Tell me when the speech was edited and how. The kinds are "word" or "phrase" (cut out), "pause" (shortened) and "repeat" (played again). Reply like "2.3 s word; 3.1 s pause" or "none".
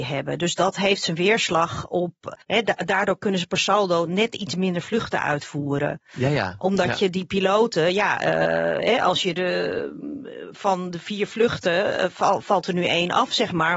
2.4 s pause